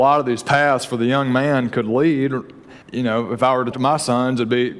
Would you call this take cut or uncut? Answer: cut